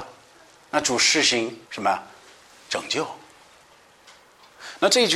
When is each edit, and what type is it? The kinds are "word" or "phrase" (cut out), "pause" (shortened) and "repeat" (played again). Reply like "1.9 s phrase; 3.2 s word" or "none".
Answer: 1.6 s pause